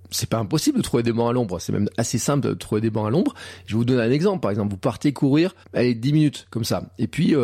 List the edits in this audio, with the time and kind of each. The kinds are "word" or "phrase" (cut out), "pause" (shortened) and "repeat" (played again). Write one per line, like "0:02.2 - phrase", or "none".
0:05.6 - pause